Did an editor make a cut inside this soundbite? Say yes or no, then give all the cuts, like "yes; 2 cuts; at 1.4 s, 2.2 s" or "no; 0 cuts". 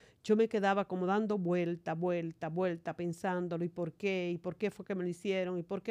no; 0 cuts